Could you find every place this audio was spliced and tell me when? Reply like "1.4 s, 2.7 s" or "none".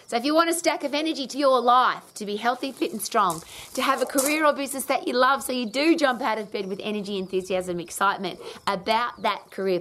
1.3 s